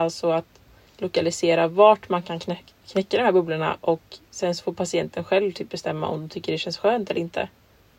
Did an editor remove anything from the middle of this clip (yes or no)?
no